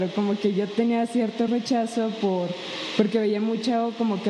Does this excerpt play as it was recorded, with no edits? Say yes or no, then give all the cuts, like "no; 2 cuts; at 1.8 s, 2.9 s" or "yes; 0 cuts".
yes; 0 cuts